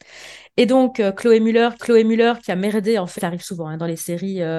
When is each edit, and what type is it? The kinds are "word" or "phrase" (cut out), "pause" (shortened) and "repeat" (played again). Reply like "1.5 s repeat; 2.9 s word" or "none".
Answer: 1.8 s repeat; 3.2 s phrase